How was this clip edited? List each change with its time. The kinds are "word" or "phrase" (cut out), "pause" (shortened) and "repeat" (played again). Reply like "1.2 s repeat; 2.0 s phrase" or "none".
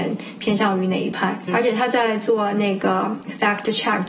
1.5 s word